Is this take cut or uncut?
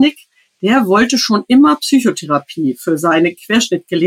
uncut